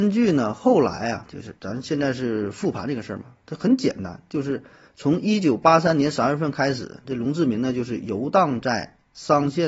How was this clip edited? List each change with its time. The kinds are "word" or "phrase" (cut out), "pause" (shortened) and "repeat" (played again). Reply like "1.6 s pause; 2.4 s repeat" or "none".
1.6 s pause